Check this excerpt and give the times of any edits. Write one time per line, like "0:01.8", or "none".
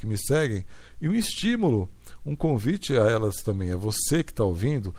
none